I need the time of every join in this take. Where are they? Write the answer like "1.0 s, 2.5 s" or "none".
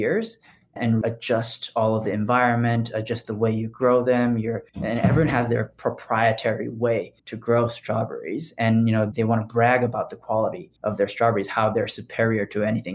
1.0 s, 4.7 s, 7.2 s, 10.8 s

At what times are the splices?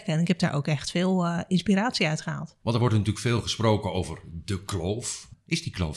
2.6 s

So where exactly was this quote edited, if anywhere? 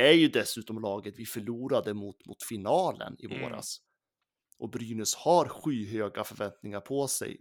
none

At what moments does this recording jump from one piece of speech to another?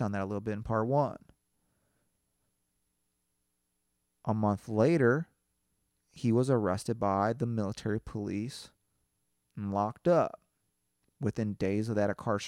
none

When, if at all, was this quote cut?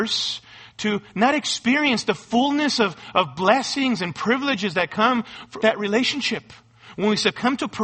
5.6 s

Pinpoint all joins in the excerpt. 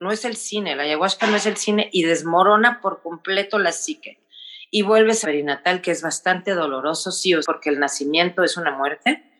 5.2 s, 7.4 s

